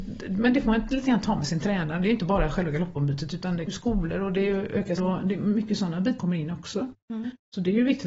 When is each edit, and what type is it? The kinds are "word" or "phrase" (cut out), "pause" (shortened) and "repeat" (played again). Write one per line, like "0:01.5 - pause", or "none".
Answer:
0:03.7 - word
0:05.0 - word
0:06.2 - word